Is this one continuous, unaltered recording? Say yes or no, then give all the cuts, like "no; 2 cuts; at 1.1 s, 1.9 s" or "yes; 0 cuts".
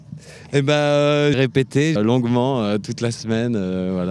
no; 2 cuts; at 1.3 s, 2.0 s